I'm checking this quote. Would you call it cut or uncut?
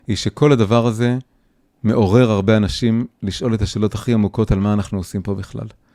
uncut